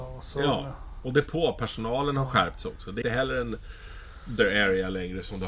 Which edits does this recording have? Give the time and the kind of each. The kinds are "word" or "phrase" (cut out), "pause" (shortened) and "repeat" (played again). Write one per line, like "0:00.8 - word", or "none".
0:03.0 - word
0:04.4 - word